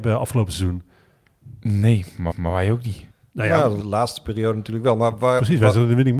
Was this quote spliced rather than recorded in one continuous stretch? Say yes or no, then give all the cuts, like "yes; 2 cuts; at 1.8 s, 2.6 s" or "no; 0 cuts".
yes; 3 cuts; at 2.3 s, 3.1 s, 3.8 s